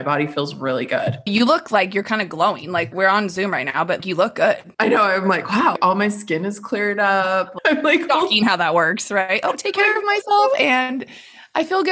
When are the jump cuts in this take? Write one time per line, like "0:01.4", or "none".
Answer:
0:04.7